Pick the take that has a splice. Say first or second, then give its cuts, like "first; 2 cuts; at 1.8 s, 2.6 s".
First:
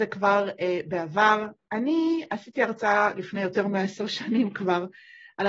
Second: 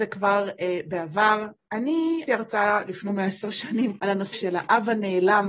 second; 4 cuts; at 2.3 s, 3.1 s, 4.0 s, 4.3 s